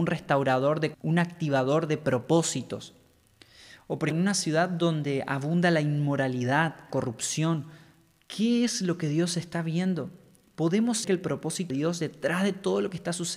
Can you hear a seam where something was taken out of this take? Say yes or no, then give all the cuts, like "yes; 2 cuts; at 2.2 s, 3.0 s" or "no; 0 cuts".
yes; 5 cuts; at 0.9 s, 4.1 s, 6.9 s, 11.0 s, 11.7 s